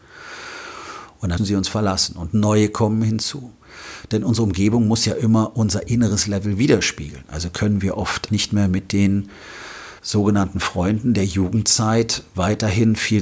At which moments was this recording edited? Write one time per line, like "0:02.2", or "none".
0:01.4
0:08.3
0:10.0